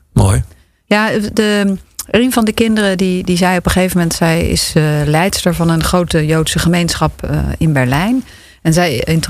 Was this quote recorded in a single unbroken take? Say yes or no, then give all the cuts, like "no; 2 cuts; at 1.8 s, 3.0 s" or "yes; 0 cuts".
yes; 0 cuts